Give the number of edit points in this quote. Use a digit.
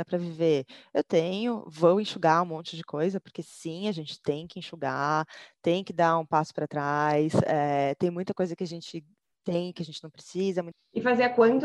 0